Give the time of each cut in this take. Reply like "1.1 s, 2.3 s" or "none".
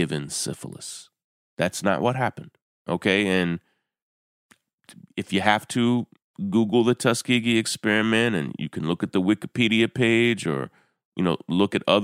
none